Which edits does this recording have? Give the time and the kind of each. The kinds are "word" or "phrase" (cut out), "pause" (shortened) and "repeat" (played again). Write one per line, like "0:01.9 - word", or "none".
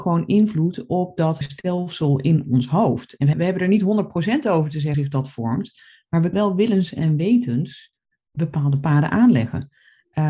0:01.4 - word
0:03.3 - word
0:04.9 - word
0:06.3 - word